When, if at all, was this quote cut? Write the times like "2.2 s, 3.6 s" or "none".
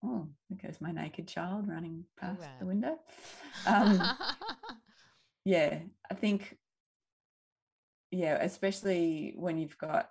none